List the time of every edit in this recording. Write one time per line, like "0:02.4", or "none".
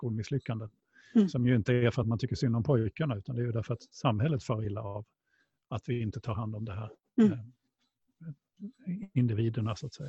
none